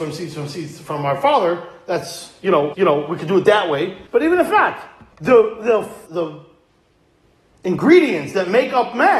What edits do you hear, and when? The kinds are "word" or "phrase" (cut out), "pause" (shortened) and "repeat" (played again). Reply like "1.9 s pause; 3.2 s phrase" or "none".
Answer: 2.7 s repeat; 4.1 s pause; 5.1 s pause; 6.1 s word